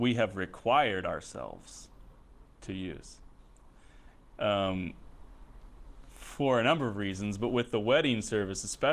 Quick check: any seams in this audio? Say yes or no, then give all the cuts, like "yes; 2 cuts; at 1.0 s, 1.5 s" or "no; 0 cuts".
no; 0 cuts